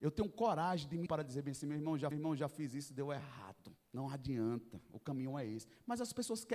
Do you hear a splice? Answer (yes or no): yes